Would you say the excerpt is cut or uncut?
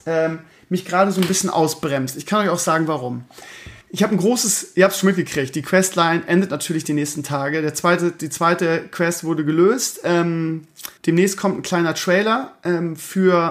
cut